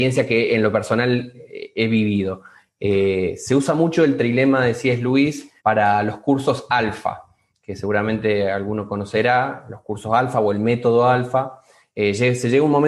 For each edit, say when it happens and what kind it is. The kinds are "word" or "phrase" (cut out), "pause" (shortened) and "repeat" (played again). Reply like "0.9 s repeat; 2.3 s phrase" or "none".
5.6 s pause